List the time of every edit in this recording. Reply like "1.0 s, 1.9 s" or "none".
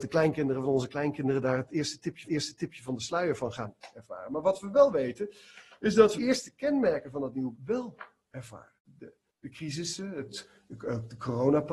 2.2 s, 6.2 s, 7.5 s, 8.8 s

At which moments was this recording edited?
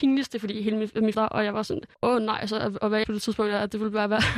1.1 s, 1.9 s, 3.0 s

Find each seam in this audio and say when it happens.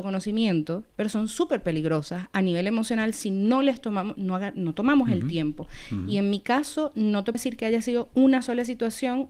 7.3 s

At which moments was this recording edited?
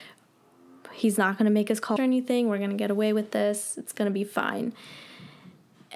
2.0 s

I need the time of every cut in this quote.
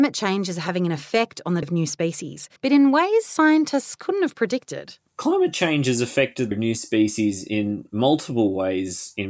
1.6 s, 2.6 s, 5.1 s, 6.5 s

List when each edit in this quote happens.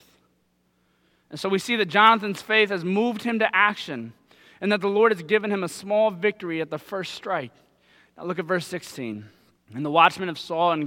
9.6 s

